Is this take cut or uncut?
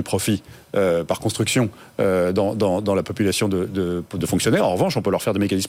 uncut